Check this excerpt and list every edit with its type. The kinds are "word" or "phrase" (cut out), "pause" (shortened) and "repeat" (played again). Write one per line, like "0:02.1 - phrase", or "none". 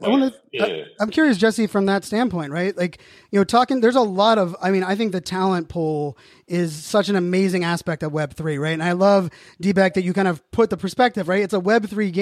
none